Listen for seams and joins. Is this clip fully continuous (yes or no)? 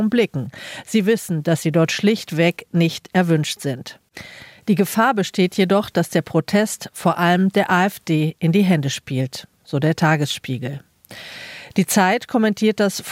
yes